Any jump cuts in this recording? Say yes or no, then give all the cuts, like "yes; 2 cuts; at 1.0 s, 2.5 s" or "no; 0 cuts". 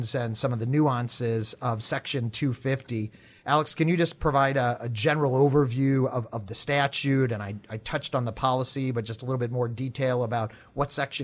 no; 0 cuts